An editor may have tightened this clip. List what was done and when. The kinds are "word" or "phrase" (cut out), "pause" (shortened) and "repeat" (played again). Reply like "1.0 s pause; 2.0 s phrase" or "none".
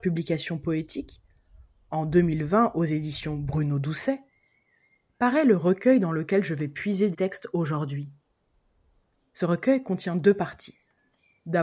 7.1 s word